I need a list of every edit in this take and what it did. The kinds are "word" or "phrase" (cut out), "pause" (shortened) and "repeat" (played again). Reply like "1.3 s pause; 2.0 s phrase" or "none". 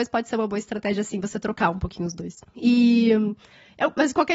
2.5 s pause